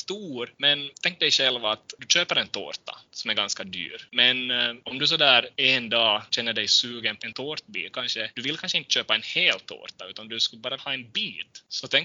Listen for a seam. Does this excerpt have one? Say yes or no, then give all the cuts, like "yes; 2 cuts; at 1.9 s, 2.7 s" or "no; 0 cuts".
yes; 3 cuts; at 7.2 s, 7.9 s, 10.8 s